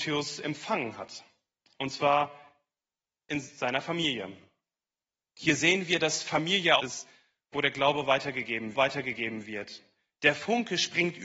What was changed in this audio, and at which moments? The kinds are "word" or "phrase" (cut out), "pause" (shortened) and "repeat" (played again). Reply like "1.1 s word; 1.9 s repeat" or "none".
6.8 s phrase; 8.7 s repeat